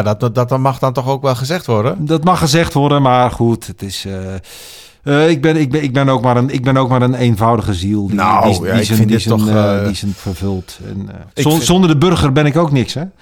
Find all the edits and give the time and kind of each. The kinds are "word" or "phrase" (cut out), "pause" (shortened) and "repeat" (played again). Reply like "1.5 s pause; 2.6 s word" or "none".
10.2 s word; 11.3 s pause